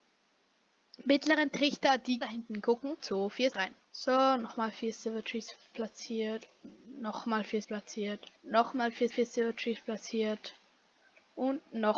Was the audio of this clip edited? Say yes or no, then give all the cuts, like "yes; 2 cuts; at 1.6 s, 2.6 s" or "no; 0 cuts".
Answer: yes; 7 cuts; at 2.2 s, 3.0 s, 3.5 s, 3.8 s, 7.6 s, 8.4 s, 9.1 s